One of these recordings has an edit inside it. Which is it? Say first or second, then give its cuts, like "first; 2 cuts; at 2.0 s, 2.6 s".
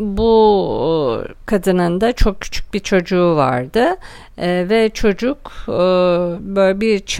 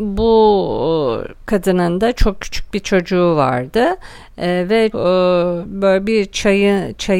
second; 1 cut; at 4.9 s